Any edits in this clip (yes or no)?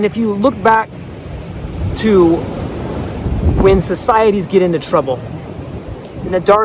no